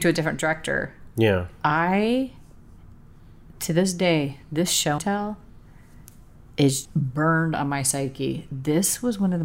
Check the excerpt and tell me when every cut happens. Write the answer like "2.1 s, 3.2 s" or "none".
5.0 s, 6.8 s